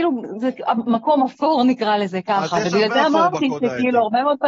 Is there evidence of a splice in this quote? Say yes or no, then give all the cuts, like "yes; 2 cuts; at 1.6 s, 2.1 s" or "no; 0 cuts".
no; 0 cuts